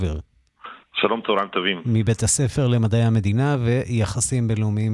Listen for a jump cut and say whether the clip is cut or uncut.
uncut